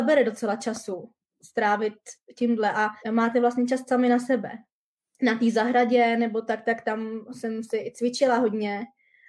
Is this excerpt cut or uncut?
cut